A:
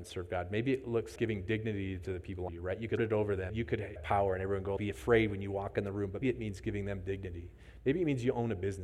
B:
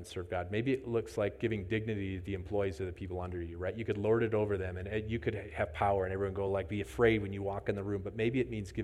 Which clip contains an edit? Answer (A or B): A